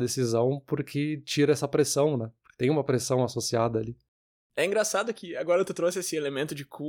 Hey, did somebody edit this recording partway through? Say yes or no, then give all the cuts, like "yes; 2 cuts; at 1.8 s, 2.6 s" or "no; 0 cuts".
no; 0 cuts